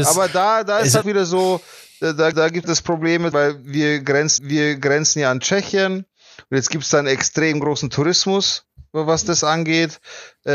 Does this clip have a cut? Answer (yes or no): yes